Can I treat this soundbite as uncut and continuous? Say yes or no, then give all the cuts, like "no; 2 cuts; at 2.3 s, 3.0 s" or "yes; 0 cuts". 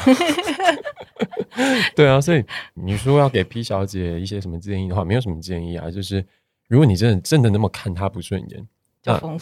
yes; 0 cuts